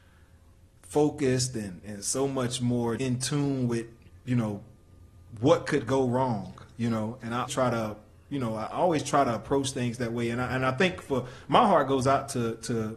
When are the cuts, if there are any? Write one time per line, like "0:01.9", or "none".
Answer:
0:03.0
0:07.5